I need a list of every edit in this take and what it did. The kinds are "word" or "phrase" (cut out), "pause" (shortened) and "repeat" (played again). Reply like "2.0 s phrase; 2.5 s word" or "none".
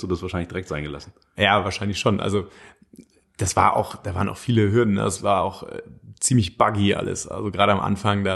none